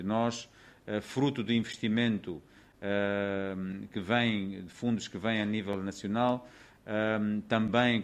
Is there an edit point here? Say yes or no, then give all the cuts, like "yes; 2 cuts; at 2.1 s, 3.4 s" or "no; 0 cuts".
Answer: no; 0 cuts